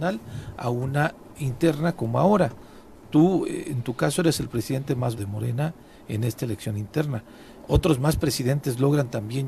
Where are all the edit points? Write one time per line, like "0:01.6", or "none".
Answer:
0:05.2